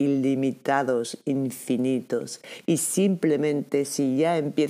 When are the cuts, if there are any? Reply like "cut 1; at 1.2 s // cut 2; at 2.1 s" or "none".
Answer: none